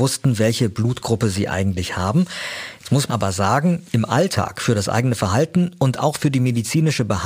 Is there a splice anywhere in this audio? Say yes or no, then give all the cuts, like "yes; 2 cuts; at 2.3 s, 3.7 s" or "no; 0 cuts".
yes; 1 cut; at 3.1 s